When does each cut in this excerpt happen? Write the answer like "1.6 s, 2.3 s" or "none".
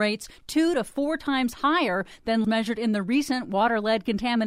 2.4 s